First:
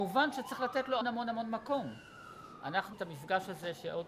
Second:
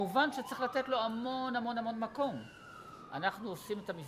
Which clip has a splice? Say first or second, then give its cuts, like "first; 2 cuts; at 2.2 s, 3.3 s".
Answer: first; 2 cuts; at 1.0 s, 2.9 s